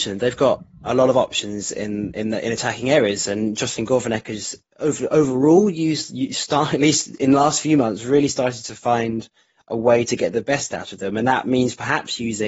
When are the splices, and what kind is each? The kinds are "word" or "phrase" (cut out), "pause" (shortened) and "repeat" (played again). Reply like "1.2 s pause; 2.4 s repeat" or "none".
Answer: none